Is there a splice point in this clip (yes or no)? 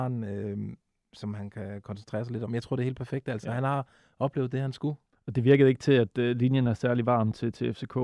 no